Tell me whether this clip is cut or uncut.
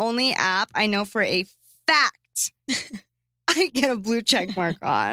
cut